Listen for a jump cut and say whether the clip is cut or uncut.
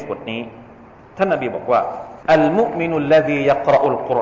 cut